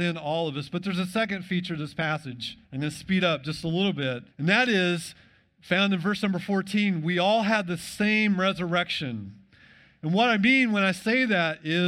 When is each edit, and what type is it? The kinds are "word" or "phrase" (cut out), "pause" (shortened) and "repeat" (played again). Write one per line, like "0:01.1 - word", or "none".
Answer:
0:02.6 - pause
0:04.3 - pause